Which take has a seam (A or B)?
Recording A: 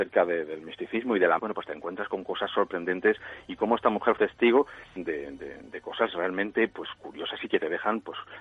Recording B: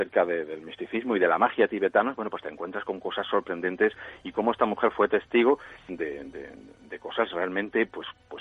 A